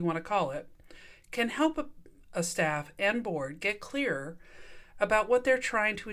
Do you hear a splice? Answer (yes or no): no